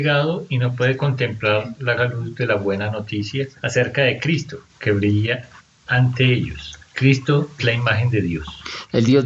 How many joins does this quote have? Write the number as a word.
four